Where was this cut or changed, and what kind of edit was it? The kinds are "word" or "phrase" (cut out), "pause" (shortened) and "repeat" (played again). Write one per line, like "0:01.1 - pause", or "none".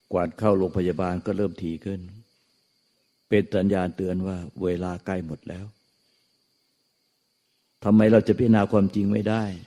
none

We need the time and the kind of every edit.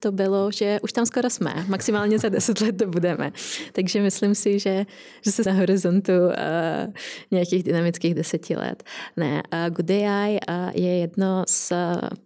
0:05.5 - phrase

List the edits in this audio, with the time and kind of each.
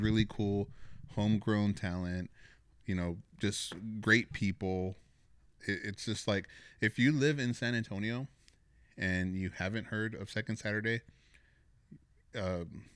none

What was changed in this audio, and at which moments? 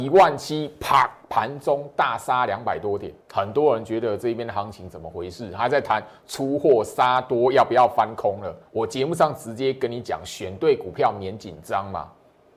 0:03.2 - pause
0:08.7 - pause

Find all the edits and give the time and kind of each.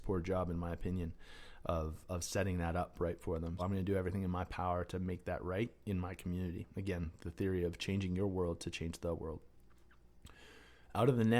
0:03.6 - word

